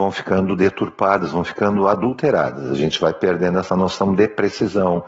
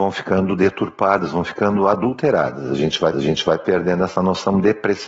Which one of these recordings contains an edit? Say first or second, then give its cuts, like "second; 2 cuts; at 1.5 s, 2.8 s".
second; 1 cut; at 3.1 s